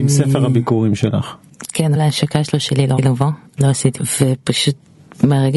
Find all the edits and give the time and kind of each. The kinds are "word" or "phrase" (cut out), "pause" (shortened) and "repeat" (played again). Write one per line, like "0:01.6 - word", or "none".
0:02.0 - word
0:02.5 - word
0:03.0 - word
0:03.6 - word
0:04.0 - word